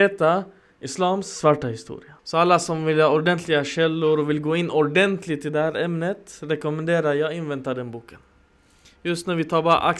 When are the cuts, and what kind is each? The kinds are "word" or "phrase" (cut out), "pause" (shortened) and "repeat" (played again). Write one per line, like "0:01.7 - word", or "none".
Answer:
0:02.2 - pause